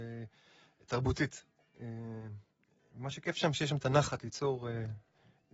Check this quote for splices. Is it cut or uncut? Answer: uncut